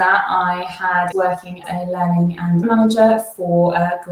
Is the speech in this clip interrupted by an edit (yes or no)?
yes